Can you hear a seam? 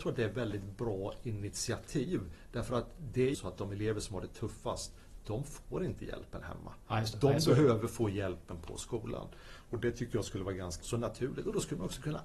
yes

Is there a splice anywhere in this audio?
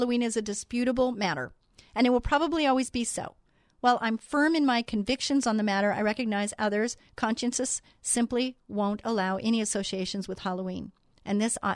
yes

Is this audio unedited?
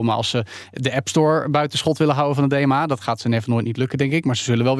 yes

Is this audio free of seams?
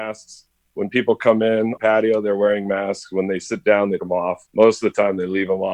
no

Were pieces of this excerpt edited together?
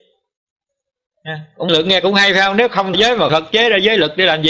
yes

